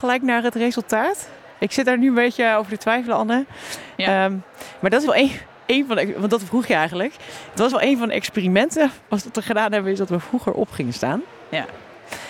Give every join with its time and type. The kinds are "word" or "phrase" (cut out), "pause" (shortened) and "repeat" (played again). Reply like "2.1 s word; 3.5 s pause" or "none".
5.1 s word; 7.7 s phrase